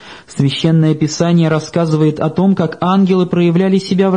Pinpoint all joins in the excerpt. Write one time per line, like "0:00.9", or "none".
none